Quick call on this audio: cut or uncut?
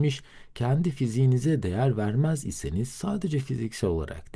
uncut